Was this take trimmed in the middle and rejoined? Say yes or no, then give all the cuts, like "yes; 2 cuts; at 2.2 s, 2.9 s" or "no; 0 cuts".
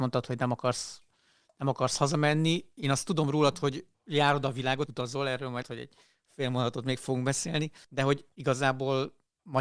yes; 3 cuts; at 3.9 s, 4.9 s, 5.6 s